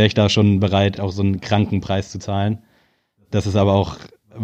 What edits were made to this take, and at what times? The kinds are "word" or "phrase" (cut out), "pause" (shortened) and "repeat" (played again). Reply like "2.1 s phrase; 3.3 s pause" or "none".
1.0 s word